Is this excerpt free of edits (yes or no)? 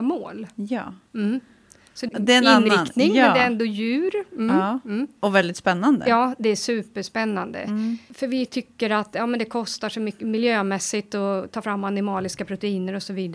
no